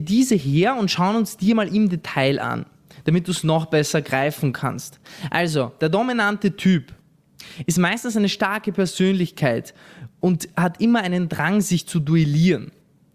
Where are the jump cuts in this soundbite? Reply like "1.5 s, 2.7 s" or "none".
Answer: none